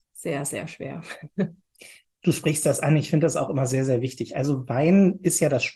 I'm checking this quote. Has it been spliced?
no; 0 cuts

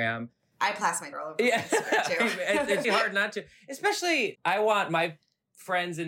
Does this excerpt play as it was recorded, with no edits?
no; 3 cuts; at 1.1 s, 2.8 s, 4.3 s

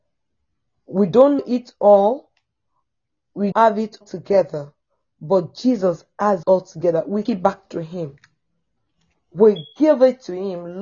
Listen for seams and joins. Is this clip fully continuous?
no; 5 cuts; at 1.4 s, 3.5 s, 4.0 s, 6.4 s, 7.2 s

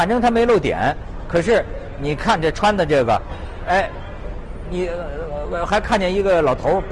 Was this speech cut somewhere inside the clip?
no; 0 cuts

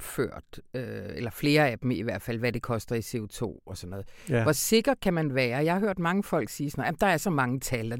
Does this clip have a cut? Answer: no; 0 cuts

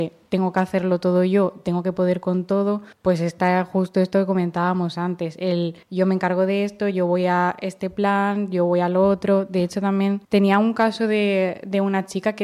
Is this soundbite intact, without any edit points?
no; 3 cuts; at 2.9 s, 5.8 s, 10.2 s

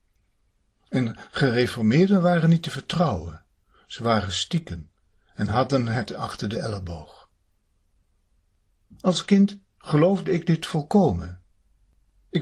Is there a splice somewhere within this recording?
no; 0 cuts

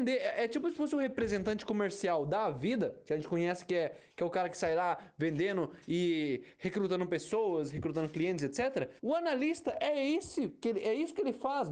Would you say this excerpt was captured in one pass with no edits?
no; 1 cut; at 9.0 s

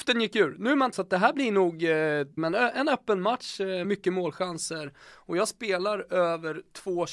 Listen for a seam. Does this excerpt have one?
yes; 3 cuts; at 0.9 s, 2.4 s, 3.8 s

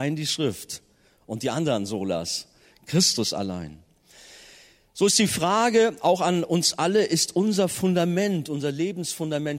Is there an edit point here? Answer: no; 0 cuts

